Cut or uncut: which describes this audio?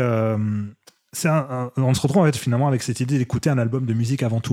uncut